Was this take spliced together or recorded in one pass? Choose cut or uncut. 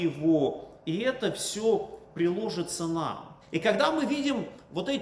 cut